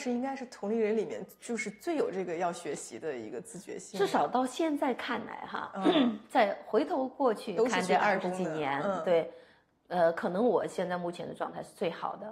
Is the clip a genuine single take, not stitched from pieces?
yes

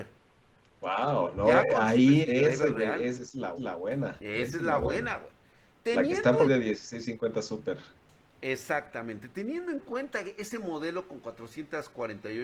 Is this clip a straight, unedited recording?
no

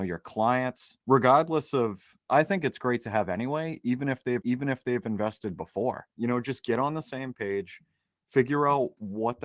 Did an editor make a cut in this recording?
yes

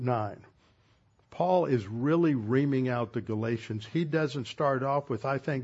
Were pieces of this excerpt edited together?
no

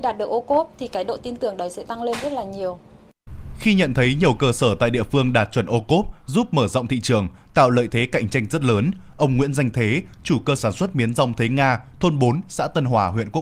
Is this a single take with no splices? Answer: no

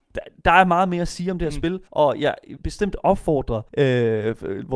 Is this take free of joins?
no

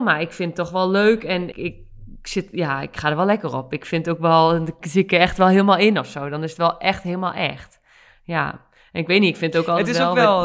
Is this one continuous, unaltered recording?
no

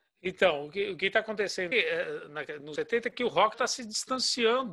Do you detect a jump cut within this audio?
yes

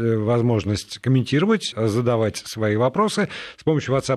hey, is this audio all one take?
no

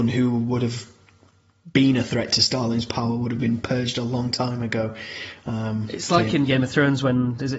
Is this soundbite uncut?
yes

